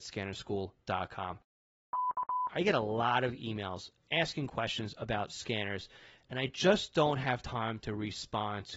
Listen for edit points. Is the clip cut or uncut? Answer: uncut